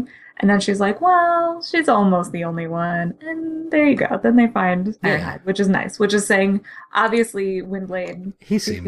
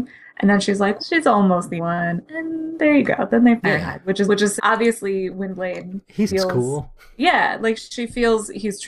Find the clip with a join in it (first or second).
second